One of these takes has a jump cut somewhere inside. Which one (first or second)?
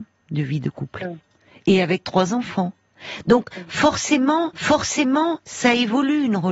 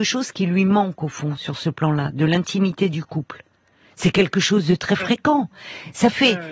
first